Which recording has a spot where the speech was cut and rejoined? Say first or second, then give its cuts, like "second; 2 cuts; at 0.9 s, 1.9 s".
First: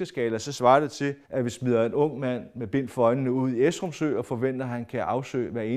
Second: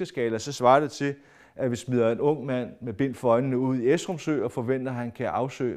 first; 1 cut; at 1.2 s